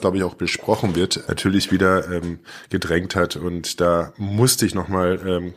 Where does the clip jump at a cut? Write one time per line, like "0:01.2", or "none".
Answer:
0:01.2